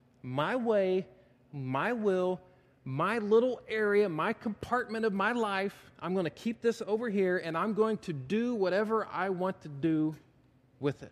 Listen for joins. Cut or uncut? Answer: uncut